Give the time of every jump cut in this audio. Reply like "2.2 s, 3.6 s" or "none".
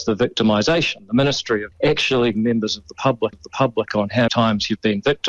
1.7 s, 2.3 s, 3.3 s, 4.3 s